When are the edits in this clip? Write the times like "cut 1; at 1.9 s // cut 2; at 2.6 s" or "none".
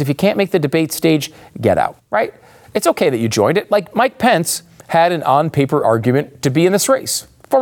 cut 1; at 2.0 s